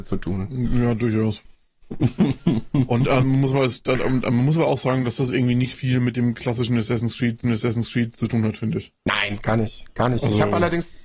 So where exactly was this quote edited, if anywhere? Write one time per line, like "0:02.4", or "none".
0:05.7
0:07.4
0:09.0